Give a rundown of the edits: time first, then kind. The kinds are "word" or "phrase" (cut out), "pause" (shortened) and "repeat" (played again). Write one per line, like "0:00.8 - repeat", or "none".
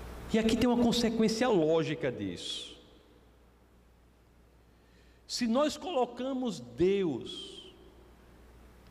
none